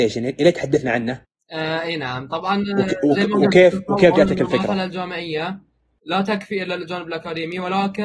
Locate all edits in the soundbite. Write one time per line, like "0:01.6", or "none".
none